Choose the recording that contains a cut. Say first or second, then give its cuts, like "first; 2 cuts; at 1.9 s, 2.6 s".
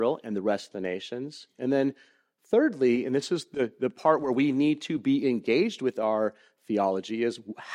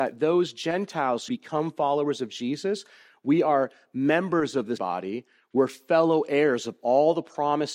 second; 2 cuts; at 1.3 s, 4.8 s